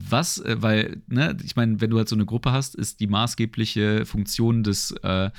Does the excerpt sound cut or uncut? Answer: uncut